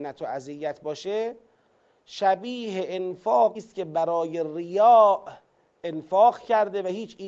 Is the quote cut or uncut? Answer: cut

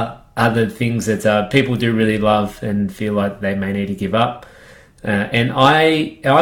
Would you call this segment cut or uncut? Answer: uncut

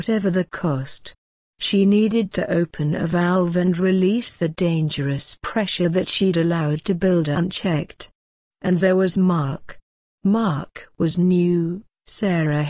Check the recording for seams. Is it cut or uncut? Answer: cut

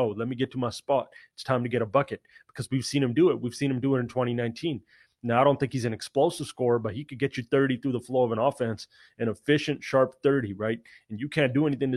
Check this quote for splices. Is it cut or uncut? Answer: uncut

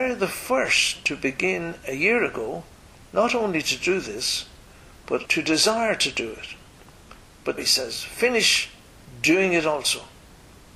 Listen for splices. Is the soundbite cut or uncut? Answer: cut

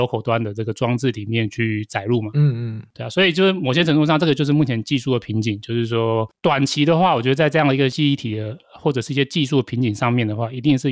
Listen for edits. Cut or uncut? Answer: uncut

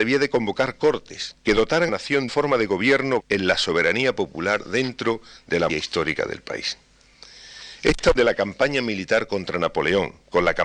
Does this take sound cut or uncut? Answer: cut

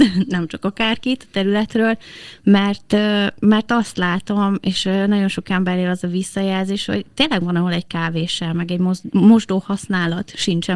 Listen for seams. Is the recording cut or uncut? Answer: uncut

